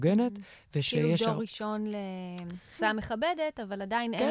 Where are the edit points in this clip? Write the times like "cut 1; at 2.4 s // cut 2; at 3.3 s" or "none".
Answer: cut 1; at 2.8 s